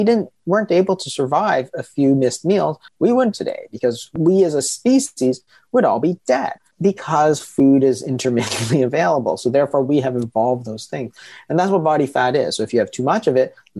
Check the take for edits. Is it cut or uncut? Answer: cut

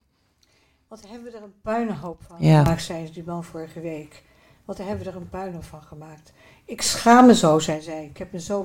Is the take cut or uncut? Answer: uncut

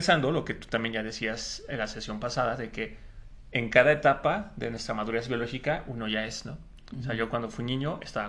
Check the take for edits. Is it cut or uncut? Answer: uncut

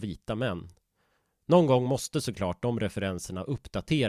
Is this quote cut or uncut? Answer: uncut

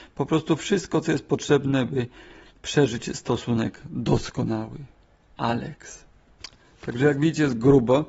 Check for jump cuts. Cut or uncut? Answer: uncut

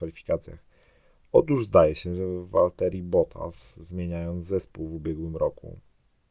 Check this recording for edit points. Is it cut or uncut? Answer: uncut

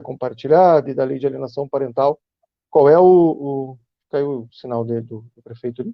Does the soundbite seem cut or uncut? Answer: uncut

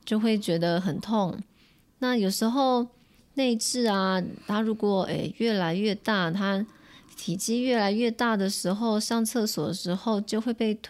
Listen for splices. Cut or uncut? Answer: uncut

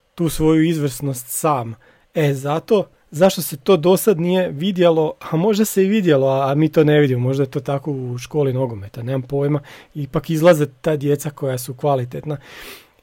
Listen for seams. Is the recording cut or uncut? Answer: uncut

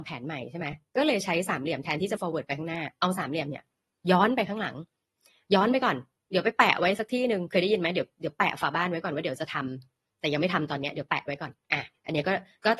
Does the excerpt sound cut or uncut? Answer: cut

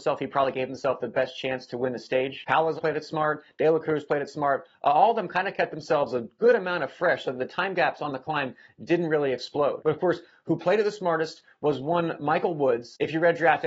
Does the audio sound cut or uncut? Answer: cut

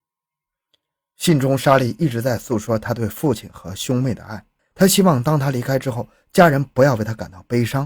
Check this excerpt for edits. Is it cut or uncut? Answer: cut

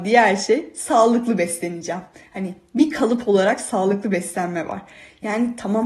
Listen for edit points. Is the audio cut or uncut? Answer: uncut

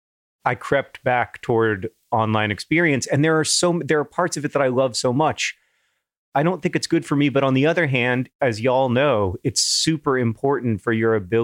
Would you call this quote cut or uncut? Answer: uncut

